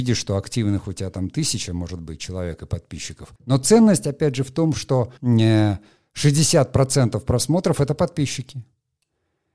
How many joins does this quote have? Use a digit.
2